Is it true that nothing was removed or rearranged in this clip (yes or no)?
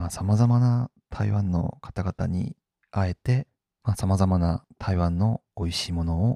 yes